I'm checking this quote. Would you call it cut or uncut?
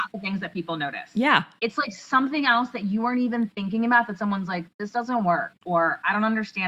uncut